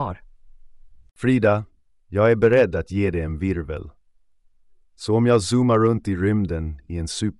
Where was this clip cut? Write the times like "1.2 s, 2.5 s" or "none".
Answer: none